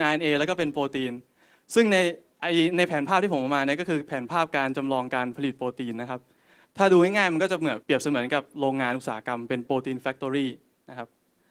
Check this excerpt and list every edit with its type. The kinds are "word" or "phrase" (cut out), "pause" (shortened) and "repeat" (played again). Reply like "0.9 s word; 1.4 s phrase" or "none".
7.8 s pause